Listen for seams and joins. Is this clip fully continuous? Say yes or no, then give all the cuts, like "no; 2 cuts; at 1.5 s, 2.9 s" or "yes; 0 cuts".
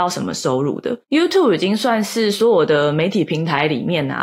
no; 1 cut; at 1.0 s